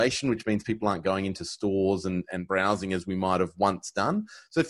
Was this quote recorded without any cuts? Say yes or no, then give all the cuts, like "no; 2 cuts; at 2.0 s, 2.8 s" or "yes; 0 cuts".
yes; 0 cuts